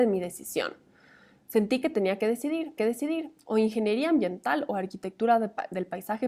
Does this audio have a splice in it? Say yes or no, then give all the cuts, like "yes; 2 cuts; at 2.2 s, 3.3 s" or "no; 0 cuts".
yes; 1 cut; at 2.8 s